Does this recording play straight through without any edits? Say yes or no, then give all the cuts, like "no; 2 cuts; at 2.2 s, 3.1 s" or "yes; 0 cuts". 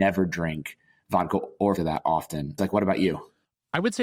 no; 2 cuts; at 1.8 s, 2.6 s